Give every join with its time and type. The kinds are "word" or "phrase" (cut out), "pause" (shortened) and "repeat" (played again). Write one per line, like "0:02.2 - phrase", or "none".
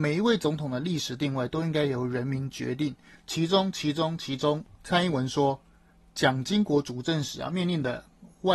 none